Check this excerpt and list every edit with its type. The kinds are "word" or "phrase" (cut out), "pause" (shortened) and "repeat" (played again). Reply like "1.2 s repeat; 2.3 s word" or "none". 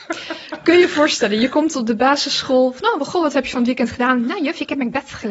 none